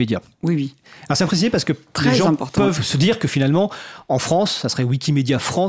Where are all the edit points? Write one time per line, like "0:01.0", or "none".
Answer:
0:01.3
0:02.7